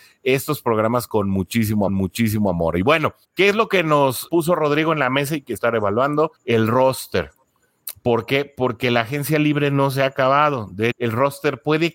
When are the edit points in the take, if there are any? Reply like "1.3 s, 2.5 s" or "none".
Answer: 1.9 s, 3.2 s, 4.3 s, 5.6 s, 6.4 s, 10.9 s